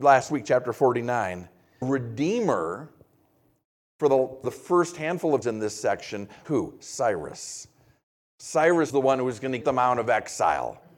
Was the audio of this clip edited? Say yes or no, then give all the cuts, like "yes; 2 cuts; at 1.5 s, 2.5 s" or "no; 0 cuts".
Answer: yes; 6 cuts; at 1.8 s, 4.4 s, 5.4 s, 6.4 s, 8.9 s, 9.6 s